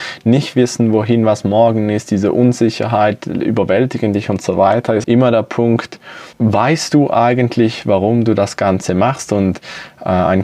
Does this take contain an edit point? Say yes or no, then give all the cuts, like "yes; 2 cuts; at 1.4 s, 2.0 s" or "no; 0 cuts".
yes; 2 cuts; at 5.0 s, 6.3 s